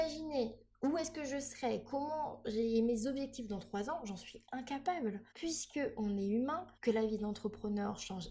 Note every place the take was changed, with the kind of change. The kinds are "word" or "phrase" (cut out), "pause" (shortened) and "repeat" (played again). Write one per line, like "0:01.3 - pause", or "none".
0:05.3 - pause
0:06.7 - pause

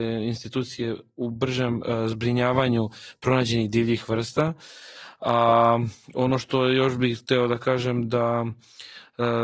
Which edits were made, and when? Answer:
0:06.0 - pause

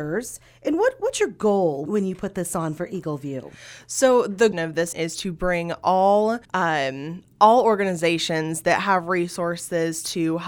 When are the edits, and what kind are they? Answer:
0:01.9 - word
0:04.5 - phrase
0:04.9 - word
0:06.4 - pause

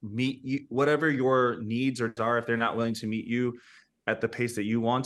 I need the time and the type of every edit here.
0:02.2 - word

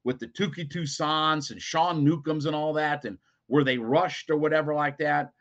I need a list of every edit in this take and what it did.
none

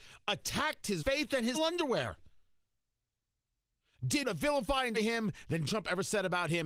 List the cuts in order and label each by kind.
0:01.0 - word
0:01.5 - word
0:04.2 - word
0:04.9 - word
0:05.7 - word

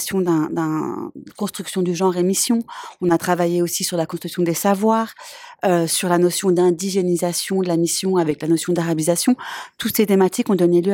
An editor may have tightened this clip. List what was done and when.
none

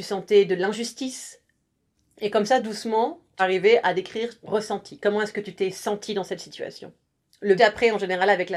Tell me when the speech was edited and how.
0:03.4 - word
0:04.4 - word
0:07.6 - word

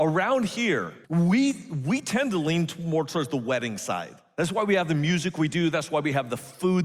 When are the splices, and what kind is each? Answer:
0:01.0 - pause

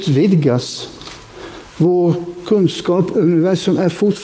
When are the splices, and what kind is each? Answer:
0:03.1 - word

